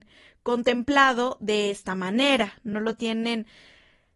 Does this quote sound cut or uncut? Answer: uncut